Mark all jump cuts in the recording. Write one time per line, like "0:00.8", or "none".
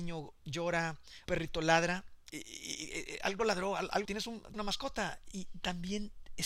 0:01.3
0:02.3
0:04.0
0:04.5
0:05.3